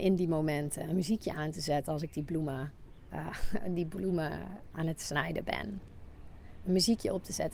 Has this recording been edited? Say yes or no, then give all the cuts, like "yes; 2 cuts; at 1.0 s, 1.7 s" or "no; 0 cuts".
no; 0 cuts